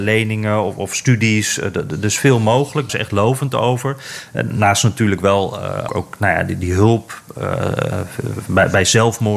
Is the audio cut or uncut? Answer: cut